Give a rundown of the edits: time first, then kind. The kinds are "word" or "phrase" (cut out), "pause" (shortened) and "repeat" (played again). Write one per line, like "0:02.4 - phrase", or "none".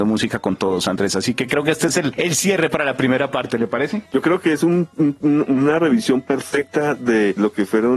none